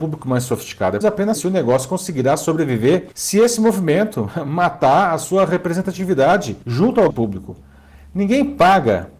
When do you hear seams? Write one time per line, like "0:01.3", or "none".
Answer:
0:01.0
0:01.3
0:03.1
0:06.6
0:07.1